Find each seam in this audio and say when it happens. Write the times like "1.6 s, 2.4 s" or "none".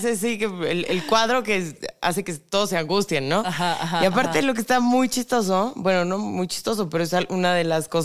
none